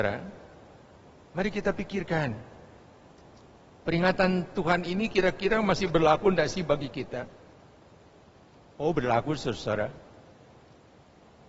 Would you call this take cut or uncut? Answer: uncut